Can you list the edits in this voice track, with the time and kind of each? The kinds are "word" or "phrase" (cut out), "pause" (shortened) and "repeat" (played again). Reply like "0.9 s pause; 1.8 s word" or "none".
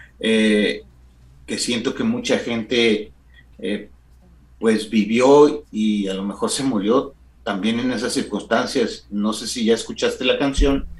none